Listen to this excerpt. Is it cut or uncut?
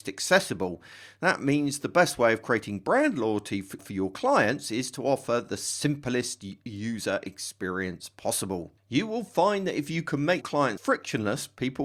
cut